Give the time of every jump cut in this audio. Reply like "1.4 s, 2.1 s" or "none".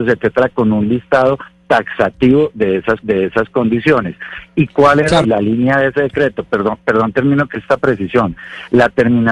3.0 s, 5.2 s, 7.5 s